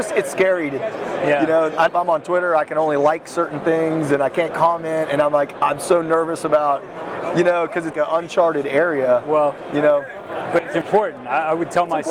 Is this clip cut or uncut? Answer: cut